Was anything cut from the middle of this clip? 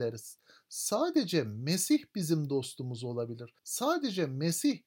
yes; 1 cut; at 3.6 s

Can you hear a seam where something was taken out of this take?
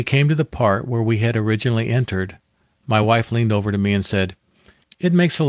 no; 0 cuts

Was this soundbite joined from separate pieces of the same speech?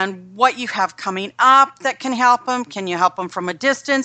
no; 0 cuts

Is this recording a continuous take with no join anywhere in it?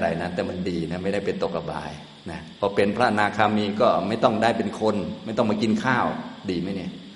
yes; 0 cuts

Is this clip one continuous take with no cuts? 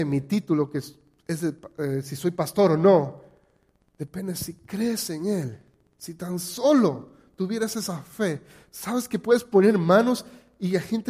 yes; 0 cuts

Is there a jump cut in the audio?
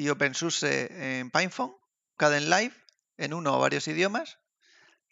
yes; 1 cut; at 2.2 s

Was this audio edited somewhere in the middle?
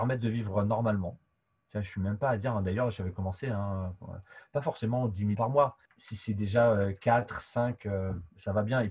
yes; 2 cuts; at 5.3 s, 5.9 s

